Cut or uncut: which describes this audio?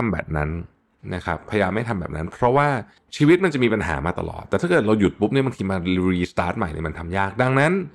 uncut